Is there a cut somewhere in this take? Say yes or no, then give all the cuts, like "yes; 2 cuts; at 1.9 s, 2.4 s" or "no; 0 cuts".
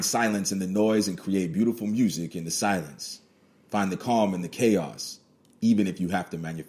no; 0 cuts